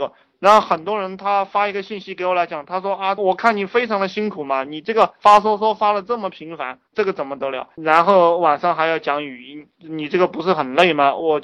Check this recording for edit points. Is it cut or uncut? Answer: cut